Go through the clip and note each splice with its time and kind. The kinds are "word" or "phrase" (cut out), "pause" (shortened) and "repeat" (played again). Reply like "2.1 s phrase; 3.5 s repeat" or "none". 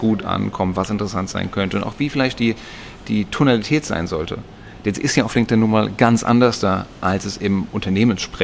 none

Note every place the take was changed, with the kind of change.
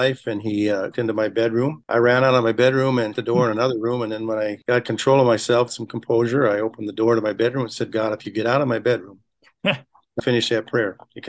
0.9 s word; 3.1 s word; 5.7 s phrase; 10.2 s word

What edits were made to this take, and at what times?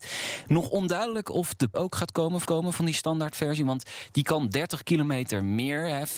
1.7 s word; 2.5 s repeat

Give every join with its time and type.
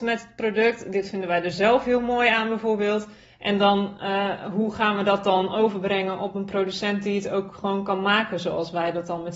none

